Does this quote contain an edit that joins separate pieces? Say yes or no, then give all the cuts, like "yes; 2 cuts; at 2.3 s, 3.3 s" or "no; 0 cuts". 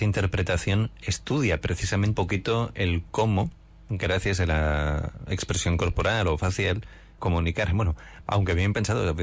yes; 3 cuts; at 2.1 s, 2.7 s, 7.2 s